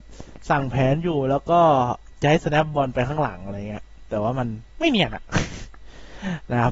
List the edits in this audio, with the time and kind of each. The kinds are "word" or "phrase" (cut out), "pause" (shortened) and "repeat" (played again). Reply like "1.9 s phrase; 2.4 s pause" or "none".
4.7 s pause